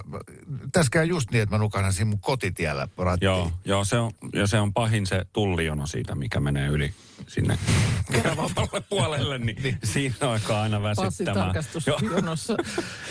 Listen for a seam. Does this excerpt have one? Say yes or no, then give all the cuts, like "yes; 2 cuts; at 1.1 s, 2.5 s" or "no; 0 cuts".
no; 0 cuts